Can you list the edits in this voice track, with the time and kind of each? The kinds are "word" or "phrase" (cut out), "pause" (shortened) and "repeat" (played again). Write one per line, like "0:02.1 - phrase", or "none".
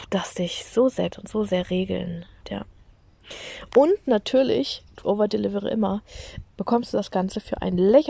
0:01.1 - phrase
0:02.4 - word
0:05.0 - phrase
0:06.4 - word